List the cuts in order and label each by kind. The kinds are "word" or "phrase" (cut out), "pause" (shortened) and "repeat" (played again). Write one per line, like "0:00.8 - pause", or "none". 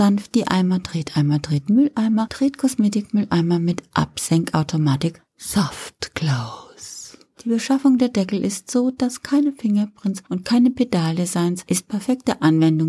none